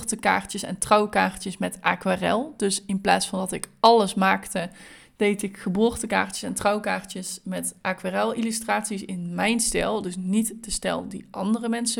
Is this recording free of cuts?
yes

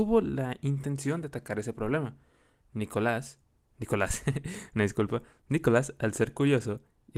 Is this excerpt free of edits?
yes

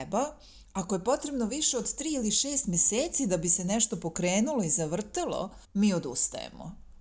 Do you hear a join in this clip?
yes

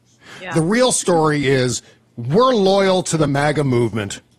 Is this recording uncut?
yes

